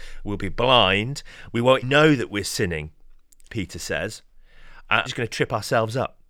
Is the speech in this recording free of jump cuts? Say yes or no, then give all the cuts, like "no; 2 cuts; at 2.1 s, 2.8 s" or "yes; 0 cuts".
no; 3 cuts; at 1.8 s, 3.5 s, 5.1 s